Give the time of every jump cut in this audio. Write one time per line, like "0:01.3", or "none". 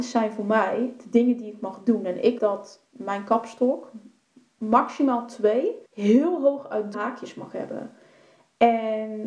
0:02.4
0:05.9
0:06.9